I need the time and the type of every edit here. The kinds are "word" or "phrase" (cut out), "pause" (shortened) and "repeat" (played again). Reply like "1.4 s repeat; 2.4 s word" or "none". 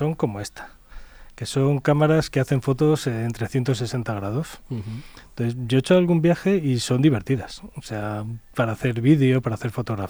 none